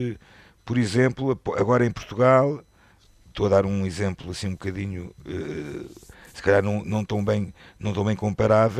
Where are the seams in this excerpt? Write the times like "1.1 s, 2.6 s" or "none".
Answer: none